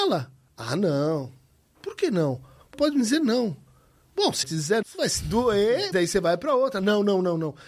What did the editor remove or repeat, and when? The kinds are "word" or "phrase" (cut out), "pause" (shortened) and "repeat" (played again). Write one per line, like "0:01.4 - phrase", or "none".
0:02.7 - word
0:04.4 - word
0:04.8 - word
0:05.9 - word